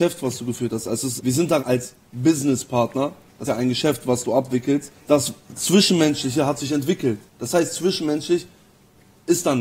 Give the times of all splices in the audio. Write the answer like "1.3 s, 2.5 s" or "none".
1.2 s, 1.6 s, 3.5 s, 5.0 s, 7.3 s